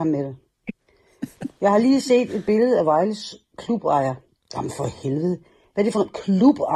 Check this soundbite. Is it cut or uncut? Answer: uncut